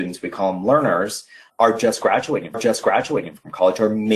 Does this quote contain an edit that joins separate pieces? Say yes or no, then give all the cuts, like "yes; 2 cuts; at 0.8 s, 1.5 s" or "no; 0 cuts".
yes; 1 cut; at 2.5 s